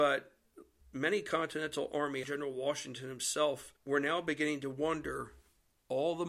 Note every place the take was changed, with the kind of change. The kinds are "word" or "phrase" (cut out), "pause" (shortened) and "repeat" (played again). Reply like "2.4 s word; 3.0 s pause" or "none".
2.2 s phrase; 3.8 s pause